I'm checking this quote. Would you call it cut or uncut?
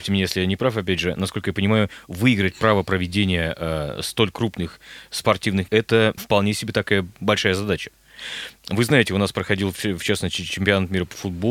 cut